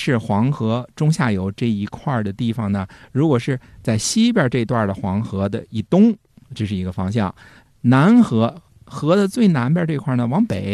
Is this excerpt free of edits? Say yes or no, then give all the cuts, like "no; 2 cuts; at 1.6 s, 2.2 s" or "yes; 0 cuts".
yes; 0 cuts